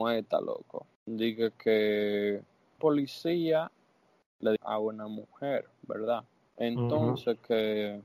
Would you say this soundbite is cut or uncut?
cut